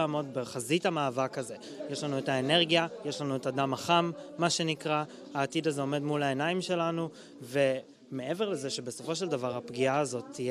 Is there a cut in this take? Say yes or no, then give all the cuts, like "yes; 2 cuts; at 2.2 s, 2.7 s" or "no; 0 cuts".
no; 0 cuts